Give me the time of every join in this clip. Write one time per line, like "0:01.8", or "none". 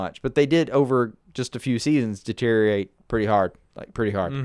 none